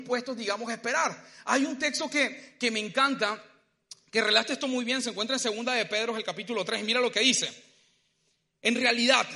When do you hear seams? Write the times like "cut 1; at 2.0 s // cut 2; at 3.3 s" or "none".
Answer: none